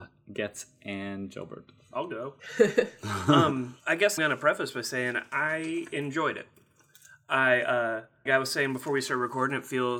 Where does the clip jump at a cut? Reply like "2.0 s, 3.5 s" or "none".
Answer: 2.4 s, 3.8 s, 4.2 s, 8.3 s